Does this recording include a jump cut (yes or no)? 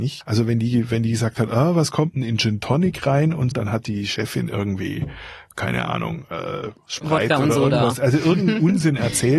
yes